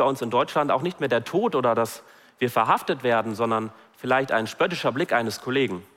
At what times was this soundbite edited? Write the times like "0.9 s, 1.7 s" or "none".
none